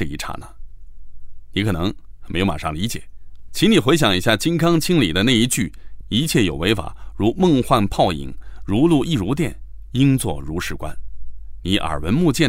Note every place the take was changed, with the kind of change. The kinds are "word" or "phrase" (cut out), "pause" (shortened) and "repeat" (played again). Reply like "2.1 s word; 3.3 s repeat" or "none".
3.5 s phrase